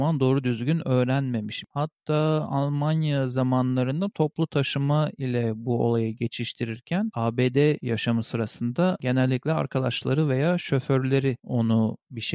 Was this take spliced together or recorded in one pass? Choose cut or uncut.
uncut